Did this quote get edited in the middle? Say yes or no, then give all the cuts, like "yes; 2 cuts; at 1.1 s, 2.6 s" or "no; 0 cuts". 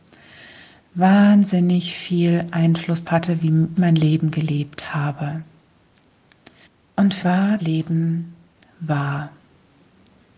yes; 5 cuts; at 3.1 s, 3.8 s, 6.6 s, 7.2 s, 7.6 s